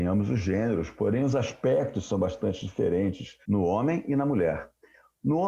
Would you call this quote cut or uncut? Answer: cut